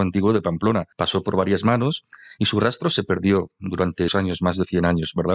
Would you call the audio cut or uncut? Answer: cut